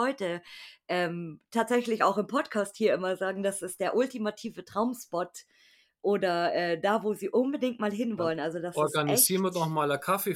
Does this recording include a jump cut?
no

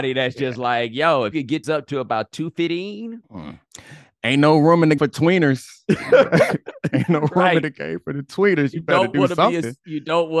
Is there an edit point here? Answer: yes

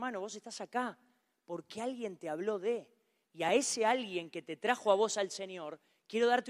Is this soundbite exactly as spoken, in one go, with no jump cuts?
yes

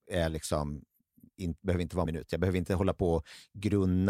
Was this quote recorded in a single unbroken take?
no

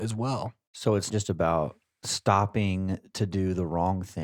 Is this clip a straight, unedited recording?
no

